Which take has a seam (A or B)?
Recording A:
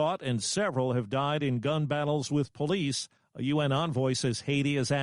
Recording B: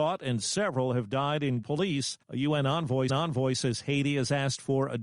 B